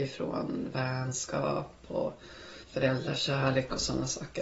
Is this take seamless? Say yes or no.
no